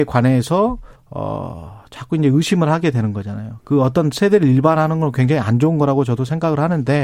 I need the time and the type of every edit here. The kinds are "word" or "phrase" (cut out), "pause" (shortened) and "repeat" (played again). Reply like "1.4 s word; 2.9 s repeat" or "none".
0.9 s pause